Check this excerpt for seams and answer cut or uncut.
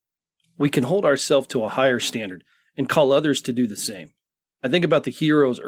uncut